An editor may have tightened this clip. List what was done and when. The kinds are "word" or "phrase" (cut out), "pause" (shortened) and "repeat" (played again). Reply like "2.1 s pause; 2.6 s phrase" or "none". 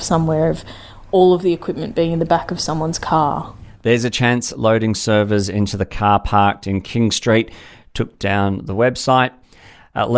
none